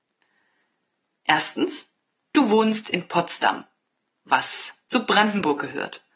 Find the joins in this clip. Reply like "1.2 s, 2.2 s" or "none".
none